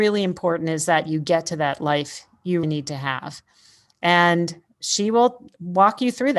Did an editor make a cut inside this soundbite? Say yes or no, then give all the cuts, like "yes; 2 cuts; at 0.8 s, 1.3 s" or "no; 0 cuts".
yes; 1 cut; at 2.6 s